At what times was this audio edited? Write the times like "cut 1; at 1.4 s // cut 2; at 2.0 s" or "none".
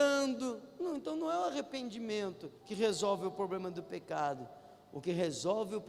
cut 1; at 2.6 s